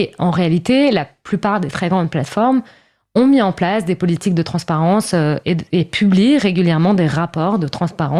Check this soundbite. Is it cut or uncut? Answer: uncut